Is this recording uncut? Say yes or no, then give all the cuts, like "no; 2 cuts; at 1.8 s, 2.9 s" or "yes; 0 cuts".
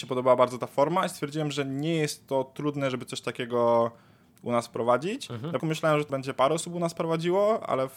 no; 2 cuts; at 5.6 s, 6.1 s